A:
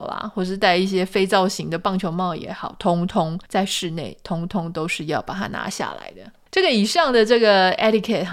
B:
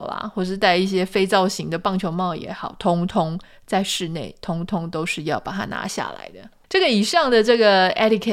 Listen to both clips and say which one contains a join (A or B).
A